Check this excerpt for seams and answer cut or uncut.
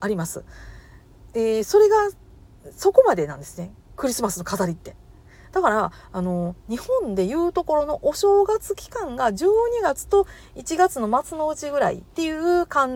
uncut